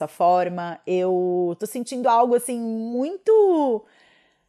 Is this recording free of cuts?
yes; 0 cuts

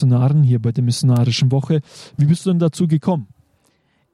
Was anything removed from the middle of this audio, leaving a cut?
no; 0 cuts

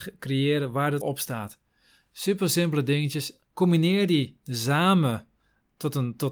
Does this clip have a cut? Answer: yes; 2 cuts; at 1.0 s, 3.4 s

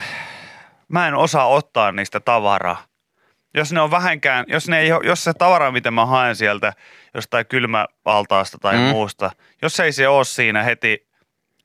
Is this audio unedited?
yes; 0 cuts

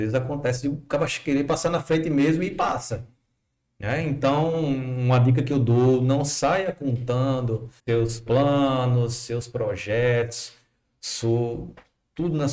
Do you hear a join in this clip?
yes; 1 cut; at 7.8 s

